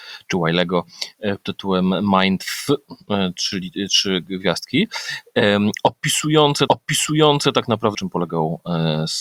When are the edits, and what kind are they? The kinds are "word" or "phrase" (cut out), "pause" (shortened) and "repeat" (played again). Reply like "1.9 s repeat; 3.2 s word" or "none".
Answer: 1.4 s word; 6.7 s repeat; 7.9 s word